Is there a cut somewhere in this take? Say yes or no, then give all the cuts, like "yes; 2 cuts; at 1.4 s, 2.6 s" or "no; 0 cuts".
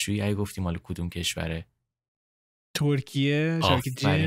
no; 0 cuts